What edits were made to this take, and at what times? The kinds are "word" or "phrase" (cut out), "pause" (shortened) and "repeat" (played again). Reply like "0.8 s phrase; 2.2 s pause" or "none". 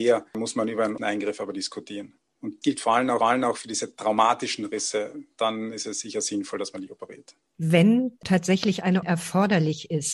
1.0 s word; 2.6 s word; 3.2 s repeat; 9.0 s word